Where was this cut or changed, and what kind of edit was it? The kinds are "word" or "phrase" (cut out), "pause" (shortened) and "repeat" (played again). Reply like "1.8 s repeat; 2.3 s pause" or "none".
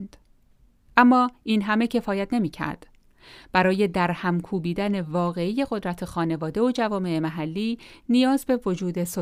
none